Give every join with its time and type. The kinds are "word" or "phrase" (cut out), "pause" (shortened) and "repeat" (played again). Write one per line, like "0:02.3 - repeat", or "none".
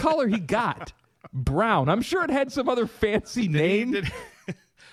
none

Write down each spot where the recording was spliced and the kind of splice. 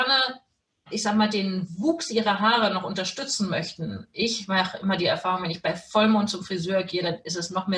none

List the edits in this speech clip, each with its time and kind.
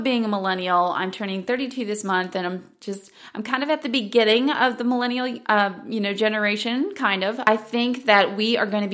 none

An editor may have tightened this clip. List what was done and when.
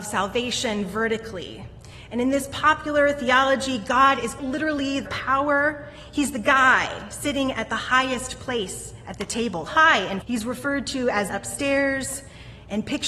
0:04.4 - word
0:05.0 - word
0:09.7 - word
0:10.2 - word
0:11.3 - phrase

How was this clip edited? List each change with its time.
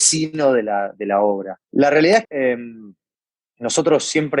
0:01.6 - pause
0:02.2 - word

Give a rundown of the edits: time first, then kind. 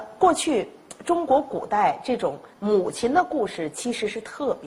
0:02.5 - pause

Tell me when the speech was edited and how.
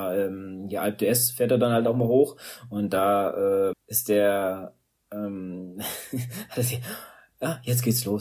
0:03.7 - word

